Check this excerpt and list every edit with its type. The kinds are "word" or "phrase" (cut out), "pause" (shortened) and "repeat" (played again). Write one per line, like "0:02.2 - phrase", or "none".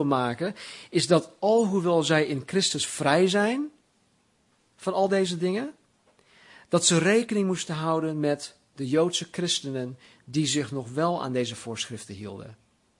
none